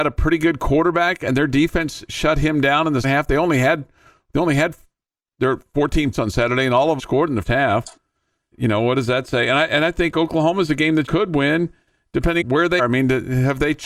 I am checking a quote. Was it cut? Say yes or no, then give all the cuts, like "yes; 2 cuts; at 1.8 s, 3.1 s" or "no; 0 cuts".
yes; 8 cuts; at 3.0 s, 6.1 s, 7.0 s, 7.4 s, 8.5 s, 11.1 s, 12.4 s, 12.8 s